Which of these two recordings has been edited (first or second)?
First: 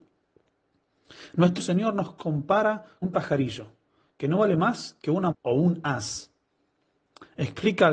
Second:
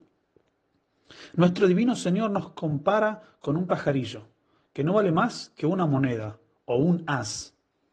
first